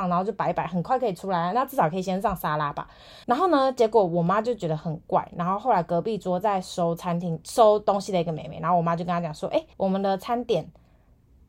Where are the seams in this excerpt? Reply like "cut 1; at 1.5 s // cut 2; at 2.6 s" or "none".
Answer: cut 1; at 3.2 s // cut 2; at 9.7 s